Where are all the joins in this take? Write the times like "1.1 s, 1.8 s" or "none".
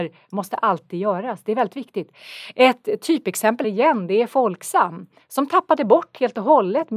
3.6 s

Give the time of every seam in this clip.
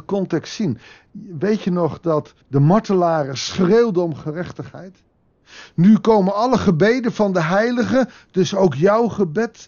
2.4 s

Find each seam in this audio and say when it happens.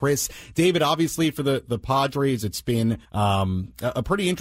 3.0 s

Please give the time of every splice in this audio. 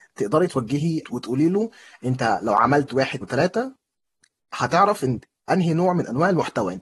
1.0 s, 3.2 s

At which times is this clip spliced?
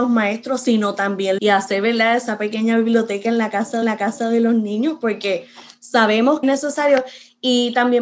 1.4 s, 3.8 s, 6.4 s

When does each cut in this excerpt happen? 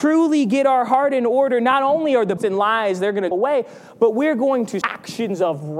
2.4 s, 3.3 s, 4.8 s

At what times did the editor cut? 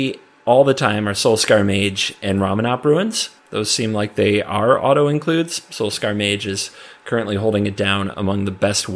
3.4 s

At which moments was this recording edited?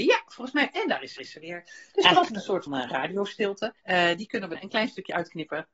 1.2 s, 2.3 s, 2.7 s, 3.8 s, 4.5 s

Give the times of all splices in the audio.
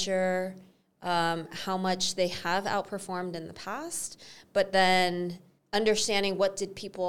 5.6 s

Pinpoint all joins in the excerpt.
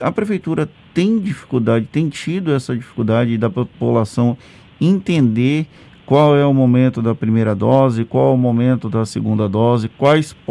none

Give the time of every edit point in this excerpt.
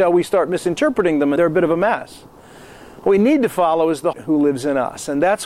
1.4 s, 4.1 s

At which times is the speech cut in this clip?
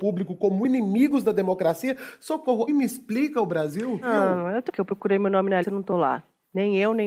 2.7 s, 4.7 s, 5.6 s

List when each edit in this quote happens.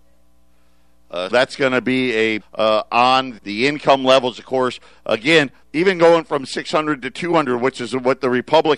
1.3 s, 2.4 s, 3.4 s, 5.6 s

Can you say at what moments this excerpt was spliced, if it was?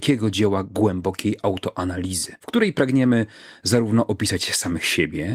2.4 s

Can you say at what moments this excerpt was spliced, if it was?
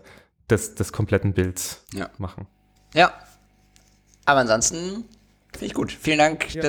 2.8 s

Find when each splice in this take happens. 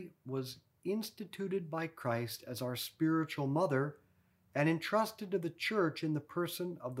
none

